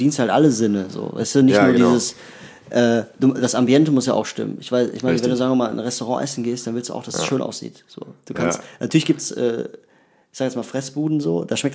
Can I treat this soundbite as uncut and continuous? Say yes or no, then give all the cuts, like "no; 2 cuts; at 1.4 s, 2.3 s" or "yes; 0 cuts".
yes; 0 cuts